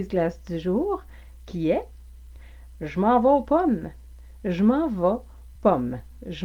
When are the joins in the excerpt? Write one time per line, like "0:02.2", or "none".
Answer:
0:05.6